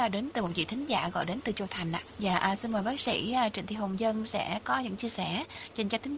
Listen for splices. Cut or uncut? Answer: cut